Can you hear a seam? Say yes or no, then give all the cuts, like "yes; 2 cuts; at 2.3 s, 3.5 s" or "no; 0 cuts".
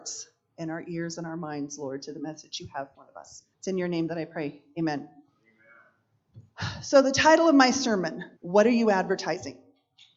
yes; 3 cuts; at 2.9 s, 3.5 s, 8.4 s